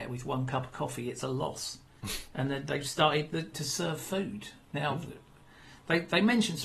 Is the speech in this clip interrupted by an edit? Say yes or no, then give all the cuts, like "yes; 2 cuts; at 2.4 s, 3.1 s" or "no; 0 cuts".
yes; 2 cuts; at 1.9 s, 3.5 s